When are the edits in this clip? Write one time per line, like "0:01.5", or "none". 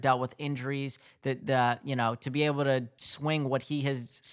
none